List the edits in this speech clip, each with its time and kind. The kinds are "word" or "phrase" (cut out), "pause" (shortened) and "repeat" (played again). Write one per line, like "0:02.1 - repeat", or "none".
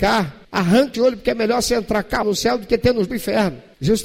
0:00.9 - word
0:02.2 - word
0:03.1 - phrase